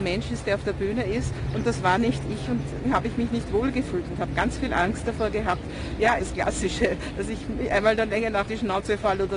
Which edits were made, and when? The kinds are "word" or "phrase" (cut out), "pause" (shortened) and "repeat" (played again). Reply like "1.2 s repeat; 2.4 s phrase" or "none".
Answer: 2.8 s word; 6.2 s word; 8.5 s word

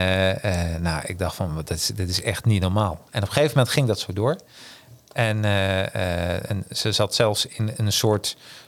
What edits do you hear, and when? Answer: none

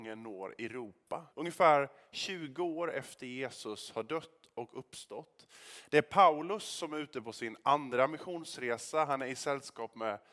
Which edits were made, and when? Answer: 1.3 s pause

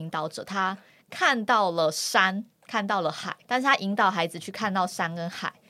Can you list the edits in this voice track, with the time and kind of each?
3.4 s pause

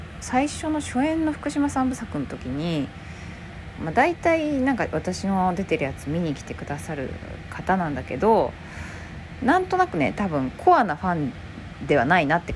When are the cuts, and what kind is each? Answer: 3.8 s phrase

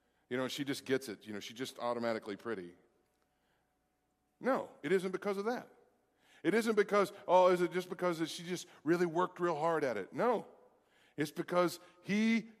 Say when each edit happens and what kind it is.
none

